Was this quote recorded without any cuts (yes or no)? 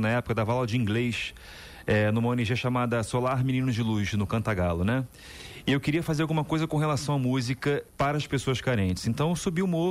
no